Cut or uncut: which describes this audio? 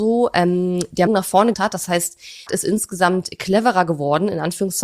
cut